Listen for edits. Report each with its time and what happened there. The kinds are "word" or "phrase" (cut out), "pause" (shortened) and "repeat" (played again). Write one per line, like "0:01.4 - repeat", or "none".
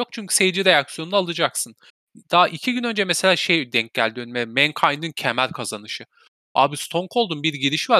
0:01.9 - pause